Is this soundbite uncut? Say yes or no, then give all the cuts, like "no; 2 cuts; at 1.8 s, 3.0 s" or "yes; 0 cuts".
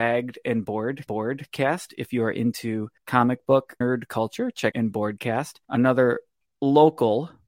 no; 5 cuts; at 1.1 s, 3.0 s, 3.8 s, 4.7 s, 5.6 s